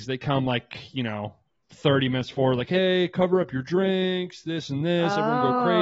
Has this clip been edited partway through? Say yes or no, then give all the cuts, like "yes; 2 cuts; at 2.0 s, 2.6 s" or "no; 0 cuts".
no; 0 cuts